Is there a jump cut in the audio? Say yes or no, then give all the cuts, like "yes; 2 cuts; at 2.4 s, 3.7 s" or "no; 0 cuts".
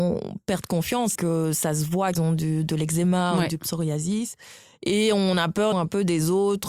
yes; 3 cuts; at 1.1 s, 2.1 s, 5.7 s